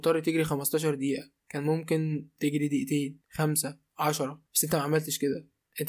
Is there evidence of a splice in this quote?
yes; 2 cuts; at 3.2 s, 4.5 s

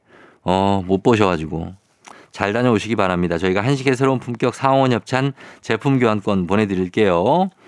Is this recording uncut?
yes; 0 cuts

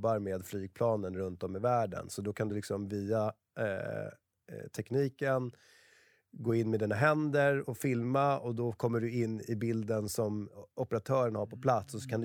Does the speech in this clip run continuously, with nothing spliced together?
yes; 0 cuts

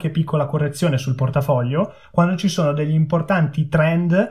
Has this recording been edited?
no; 0 cuts

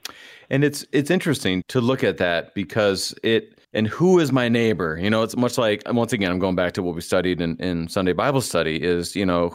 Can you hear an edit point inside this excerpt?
yes; 2 cuts; at 1.6 s, 3.6 s

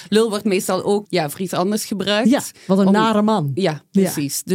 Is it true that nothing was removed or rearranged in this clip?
no; 1 cut; at 1.0 s

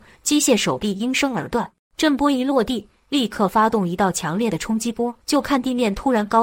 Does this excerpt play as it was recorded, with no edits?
no; 2 cuts; at 1.8 s, 5.2 s

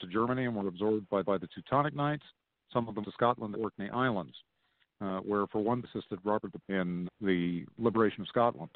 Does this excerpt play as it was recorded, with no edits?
no; 6 cuts; at 1.2 s, 3.0 s, 3.5 s, 5.8 s, 6.6 s, 7.1 s

